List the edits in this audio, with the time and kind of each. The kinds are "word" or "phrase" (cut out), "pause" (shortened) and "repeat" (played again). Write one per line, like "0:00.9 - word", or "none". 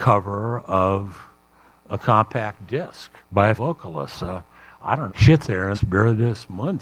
0:03.2 - pause
0:03.6 - word
0:05.1 - word
0:05.4 - word
0:05.7 - word